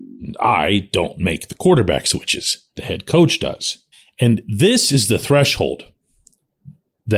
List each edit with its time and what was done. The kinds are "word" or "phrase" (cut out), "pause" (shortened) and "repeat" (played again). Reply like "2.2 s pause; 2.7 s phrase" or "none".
2.7 s pause; 3.9 s pause